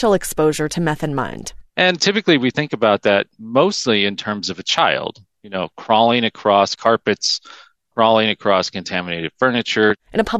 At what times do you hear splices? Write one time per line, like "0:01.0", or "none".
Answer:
0:06.8

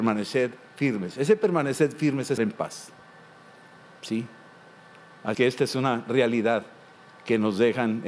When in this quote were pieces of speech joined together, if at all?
0:02.4
0:05.3

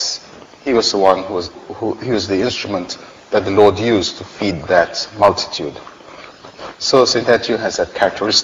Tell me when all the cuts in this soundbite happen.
0:01.5

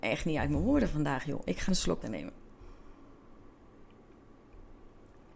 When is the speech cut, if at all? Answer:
0:01.7
0:02.0

